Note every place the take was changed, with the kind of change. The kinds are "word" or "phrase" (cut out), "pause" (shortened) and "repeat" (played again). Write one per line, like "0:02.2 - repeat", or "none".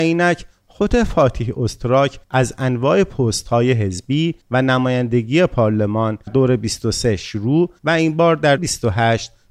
0:02.2 - pause
0:04.4 - pause
0:06.3 - word
0:07.8 - pause
0:08.6 - word